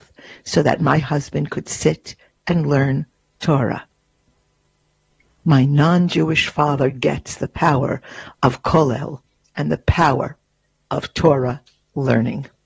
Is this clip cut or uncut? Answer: uncut